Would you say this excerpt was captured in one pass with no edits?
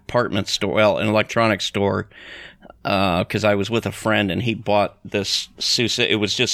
yes; 0 cuts

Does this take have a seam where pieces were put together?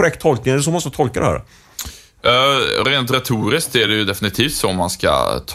no; 0 cuts

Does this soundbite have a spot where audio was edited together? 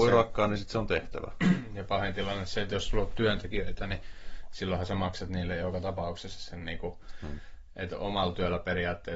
no; 0 cuts

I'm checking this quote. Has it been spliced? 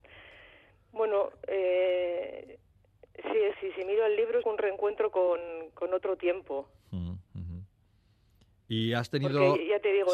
yes; 3 cuts; at 3.5 s, 4.4 s, 7.2 s

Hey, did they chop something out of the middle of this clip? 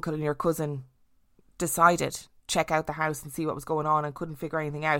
yes; 1 cut; at 2.4 s

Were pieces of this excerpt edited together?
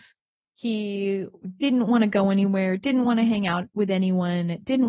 no; 0 cuts

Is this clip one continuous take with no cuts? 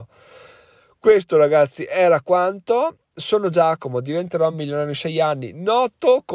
yes; 0 cuts

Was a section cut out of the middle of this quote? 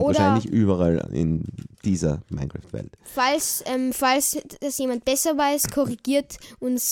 yes; 1 cut; at 1.7 s

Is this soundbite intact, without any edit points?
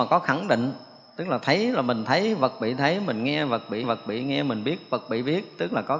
no; 1 cut; at 3.8 s

